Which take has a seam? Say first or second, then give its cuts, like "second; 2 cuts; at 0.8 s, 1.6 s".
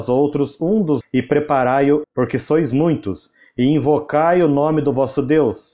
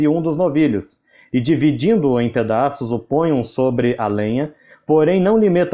first; 2 cuts; at 1.0 s, 2.0 s